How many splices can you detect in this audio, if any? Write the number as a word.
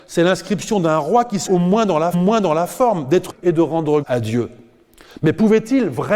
four